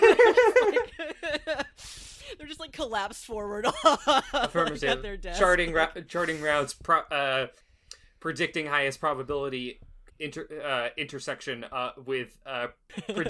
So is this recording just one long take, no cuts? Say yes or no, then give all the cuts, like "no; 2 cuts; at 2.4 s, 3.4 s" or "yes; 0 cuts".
no; 1 cut; at 10.1 s